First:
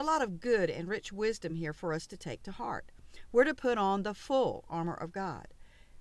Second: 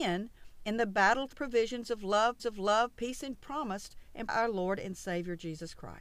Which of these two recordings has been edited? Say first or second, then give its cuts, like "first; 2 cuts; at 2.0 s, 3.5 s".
second; 4 cuts; at 1.3 s, 2.4 s, 3.3 s, 4.3 s